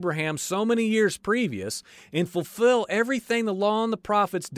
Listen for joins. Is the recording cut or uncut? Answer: uncut